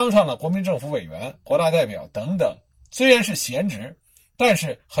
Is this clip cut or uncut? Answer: uncut